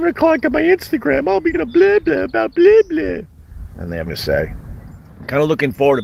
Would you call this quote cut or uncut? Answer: cut